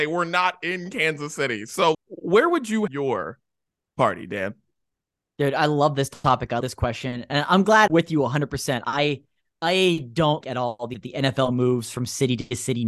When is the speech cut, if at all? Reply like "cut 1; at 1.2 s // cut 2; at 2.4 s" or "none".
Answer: cut 1; at 1.9 s // cut 2; at 2.9 s // cut 3; at 6.6 s // cut 4; at 7.9 s // cut 5; at 10.4 s // cut 6; at 10.9 s